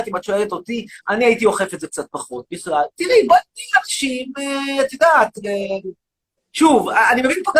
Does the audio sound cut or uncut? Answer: cut